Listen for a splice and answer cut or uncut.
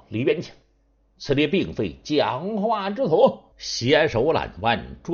cut